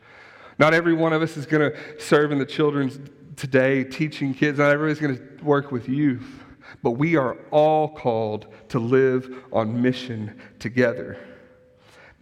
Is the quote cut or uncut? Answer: uncut